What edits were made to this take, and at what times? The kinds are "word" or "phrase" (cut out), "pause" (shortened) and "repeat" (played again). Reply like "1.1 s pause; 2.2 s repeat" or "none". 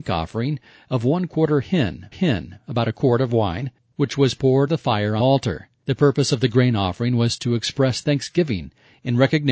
2.1 s repeat; 4.7 s word; 5.2 s word; 5.8 s pause